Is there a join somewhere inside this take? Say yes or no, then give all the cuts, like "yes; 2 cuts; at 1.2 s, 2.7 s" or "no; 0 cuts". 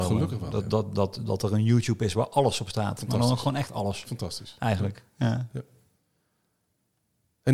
no; 0 cuts